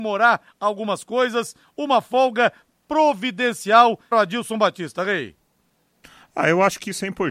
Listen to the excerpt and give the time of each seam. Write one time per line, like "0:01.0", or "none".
0:04.1